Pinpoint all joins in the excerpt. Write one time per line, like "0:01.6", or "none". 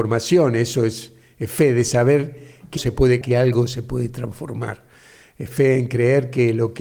0:02.8
0:03.2
0:05.5